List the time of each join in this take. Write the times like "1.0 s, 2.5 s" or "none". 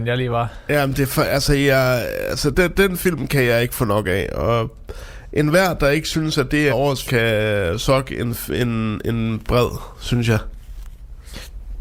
2.5 s, 6.7 s, 7.1 s